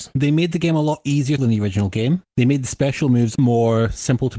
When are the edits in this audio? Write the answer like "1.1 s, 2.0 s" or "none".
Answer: 1.4 s, 2.3 s, 3.3 s